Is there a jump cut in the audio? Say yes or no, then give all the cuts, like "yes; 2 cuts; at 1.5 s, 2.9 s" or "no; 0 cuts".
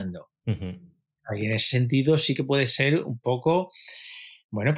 no; 0 cuts